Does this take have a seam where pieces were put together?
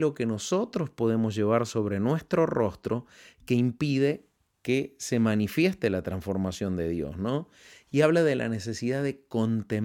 no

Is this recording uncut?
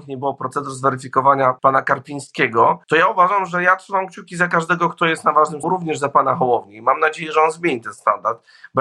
no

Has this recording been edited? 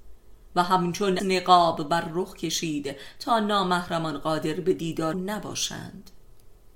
yes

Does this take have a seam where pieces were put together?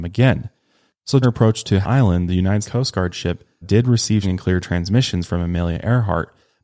yes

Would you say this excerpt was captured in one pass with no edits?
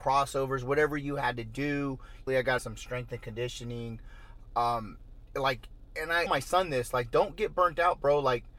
no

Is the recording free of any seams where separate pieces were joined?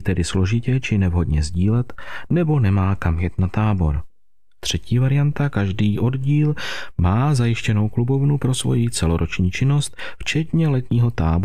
yes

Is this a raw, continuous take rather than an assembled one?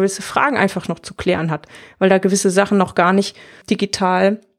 yes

